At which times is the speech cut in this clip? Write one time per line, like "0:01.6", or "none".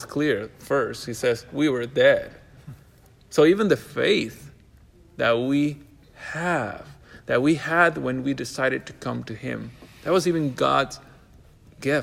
none